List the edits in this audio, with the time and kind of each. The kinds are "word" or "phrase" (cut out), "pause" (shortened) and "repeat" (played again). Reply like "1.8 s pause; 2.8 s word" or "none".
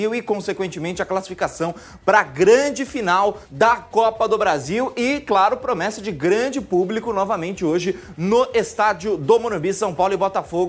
3.5 s pause

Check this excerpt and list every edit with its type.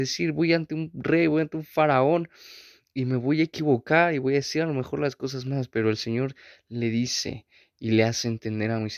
none

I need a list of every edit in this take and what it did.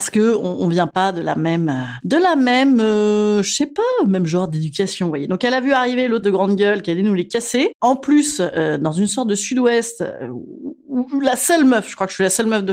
6.2 s word

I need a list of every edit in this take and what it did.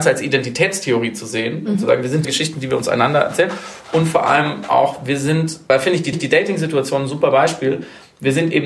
2.2 s phrase; 6.1 s repeat

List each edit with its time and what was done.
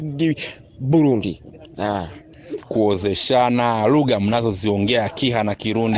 2.6 s word

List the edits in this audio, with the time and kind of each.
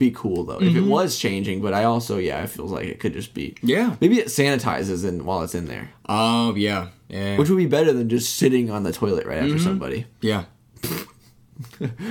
10.1 s pause

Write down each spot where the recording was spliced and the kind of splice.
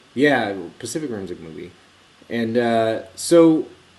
1.4 s word

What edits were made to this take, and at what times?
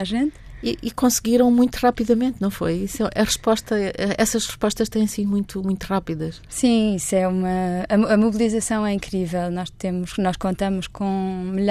none

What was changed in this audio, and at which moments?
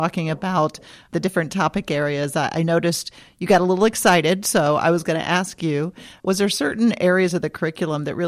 none

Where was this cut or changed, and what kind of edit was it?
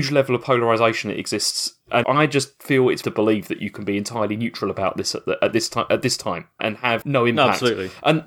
2.0 s word; 3.0 s phrase; 6.6 s word; 7.0 s word

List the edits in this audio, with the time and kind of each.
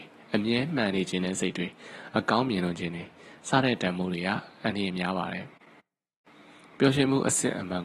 none

